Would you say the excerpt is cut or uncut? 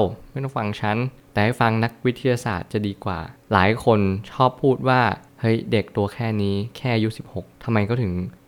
uncut